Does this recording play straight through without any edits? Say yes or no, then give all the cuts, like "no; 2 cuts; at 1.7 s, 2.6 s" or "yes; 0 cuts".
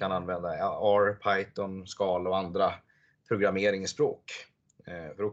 yes; 0 cuts